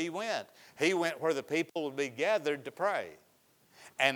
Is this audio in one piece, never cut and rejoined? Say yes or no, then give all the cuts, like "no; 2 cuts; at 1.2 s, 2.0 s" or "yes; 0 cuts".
yes; 0 cuts